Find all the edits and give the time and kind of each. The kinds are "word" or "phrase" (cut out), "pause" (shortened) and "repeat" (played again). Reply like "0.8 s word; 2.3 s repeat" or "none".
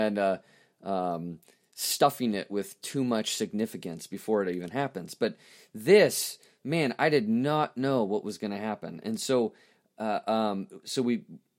none